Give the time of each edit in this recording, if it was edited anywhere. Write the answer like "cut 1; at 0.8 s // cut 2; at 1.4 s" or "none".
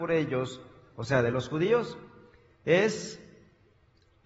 none